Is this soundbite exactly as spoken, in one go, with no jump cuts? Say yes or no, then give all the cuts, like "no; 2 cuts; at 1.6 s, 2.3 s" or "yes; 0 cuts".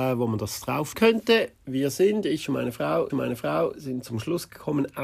no; 3 cuts; at 0.9 s, 1.6 s, 3.1 s